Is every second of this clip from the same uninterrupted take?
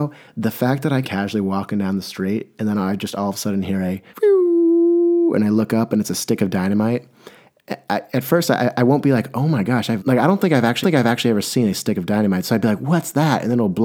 no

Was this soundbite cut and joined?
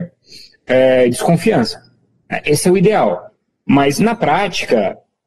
no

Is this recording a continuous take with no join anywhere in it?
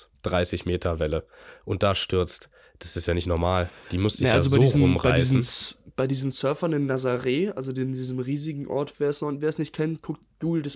yes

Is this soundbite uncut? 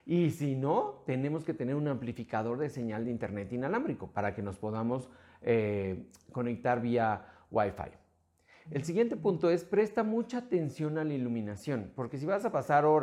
yes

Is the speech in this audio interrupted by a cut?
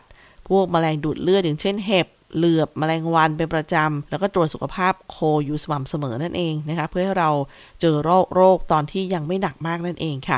yes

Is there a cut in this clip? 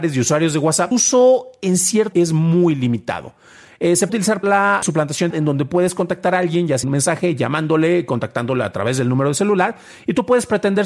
yes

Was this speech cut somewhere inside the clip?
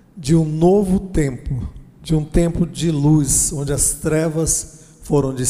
no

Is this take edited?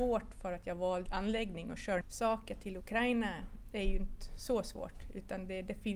yes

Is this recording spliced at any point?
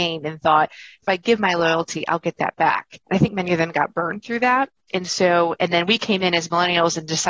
yes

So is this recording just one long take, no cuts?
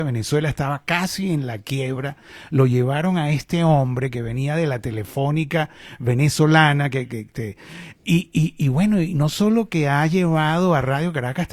yes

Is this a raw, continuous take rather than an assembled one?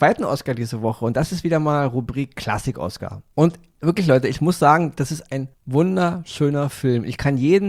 no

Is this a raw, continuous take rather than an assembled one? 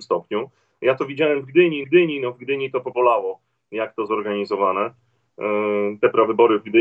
no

